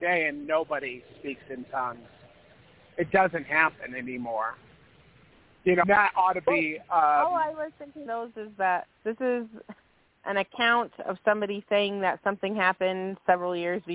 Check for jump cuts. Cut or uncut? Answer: cut